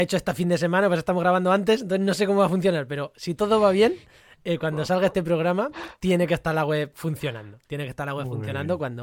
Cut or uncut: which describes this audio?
uncut